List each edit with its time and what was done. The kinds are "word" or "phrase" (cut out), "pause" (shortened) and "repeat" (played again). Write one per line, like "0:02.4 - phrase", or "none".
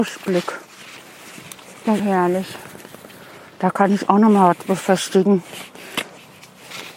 0:02.0 - phrase